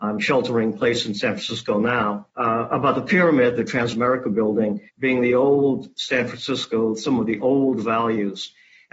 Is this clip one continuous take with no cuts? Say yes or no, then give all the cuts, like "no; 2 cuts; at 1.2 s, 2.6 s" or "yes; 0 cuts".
no; 2 cuts; at 2.3 s, 4.9 s